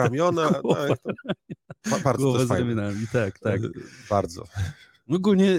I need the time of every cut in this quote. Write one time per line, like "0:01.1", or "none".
none